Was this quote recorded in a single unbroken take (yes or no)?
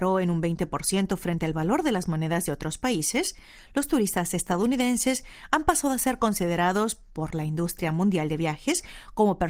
yes